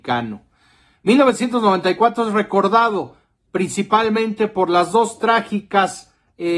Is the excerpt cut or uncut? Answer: uncut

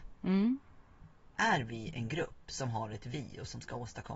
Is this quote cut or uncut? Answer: uncut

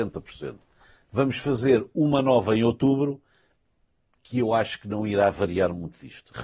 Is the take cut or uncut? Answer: uncut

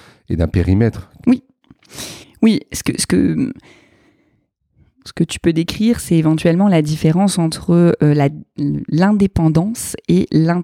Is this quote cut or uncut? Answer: cut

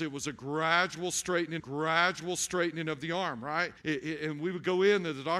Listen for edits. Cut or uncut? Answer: cut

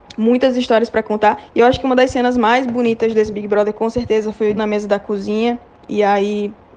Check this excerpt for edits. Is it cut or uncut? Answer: cut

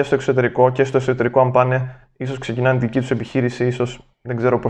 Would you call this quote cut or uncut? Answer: uncut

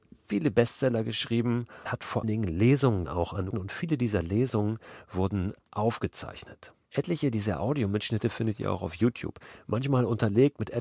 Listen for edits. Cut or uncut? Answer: cut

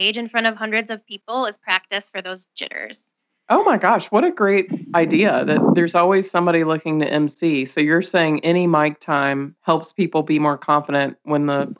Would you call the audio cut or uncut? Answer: uncut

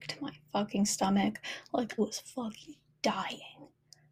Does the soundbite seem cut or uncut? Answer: cut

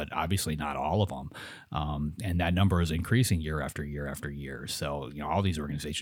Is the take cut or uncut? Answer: uncut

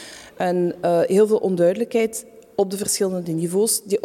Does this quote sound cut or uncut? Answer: uncut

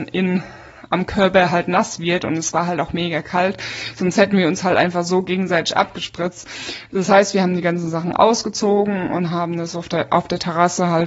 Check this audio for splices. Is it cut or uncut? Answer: uncut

